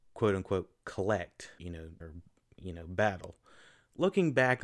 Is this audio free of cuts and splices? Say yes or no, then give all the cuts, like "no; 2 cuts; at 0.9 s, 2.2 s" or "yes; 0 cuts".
no; 2 cuts; at 1.6 s, 2.0 s